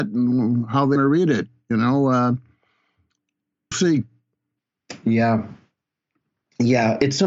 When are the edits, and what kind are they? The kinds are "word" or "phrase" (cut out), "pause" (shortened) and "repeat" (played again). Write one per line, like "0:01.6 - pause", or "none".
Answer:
0:01.0 - word
0:03.7 - word

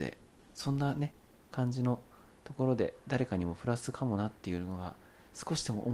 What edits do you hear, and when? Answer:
none

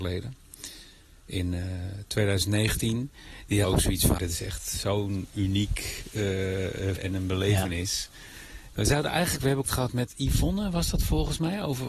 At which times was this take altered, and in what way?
0:03.6 - word
0:04.2 - word
0:07.0 - word
0:09.7 - word

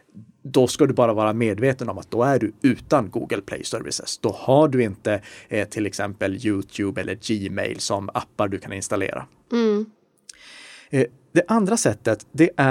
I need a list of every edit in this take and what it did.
none

